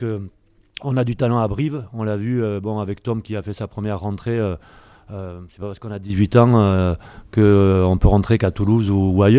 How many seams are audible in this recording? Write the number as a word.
zero